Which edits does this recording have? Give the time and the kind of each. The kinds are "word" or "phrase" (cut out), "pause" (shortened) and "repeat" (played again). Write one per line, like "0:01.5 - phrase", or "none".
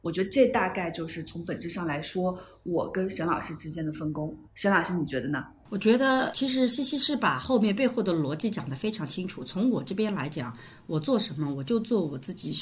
0:04.5 - pause
0:06.3 - word